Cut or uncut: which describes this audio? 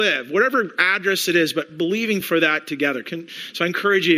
uncut